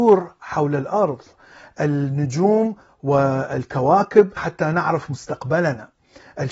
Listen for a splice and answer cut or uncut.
cut